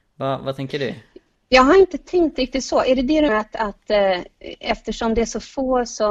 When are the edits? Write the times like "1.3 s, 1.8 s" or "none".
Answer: 3.3 s